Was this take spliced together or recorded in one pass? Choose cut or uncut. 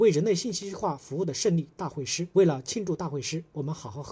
cut